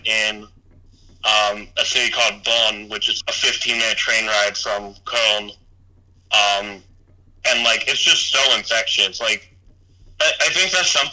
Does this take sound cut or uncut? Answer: cut